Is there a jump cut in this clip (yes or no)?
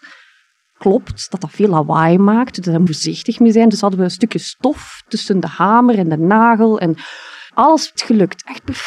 yes